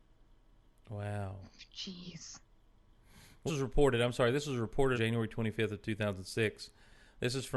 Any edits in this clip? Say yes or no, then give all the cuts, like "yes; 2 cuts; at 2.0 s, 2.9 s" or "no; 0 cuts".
yes; 2 cuts; at 3.5 s, 4.9 s